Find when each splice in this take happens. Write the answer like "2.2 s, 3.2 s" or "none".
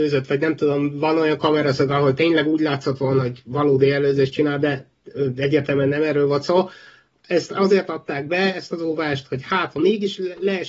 9.7 s